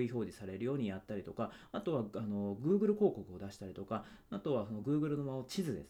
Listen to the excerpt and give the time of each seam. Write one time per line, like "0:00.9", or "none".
none